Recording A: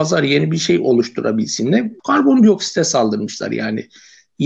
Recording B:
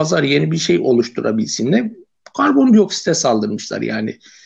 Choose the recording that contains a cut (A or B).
A